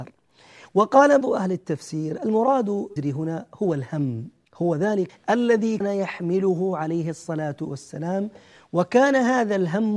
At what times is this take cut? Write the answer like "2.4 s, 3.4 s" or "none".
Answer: 1.2 s, 3.0 s, 4.4 s, 5.1 s, 5.8 s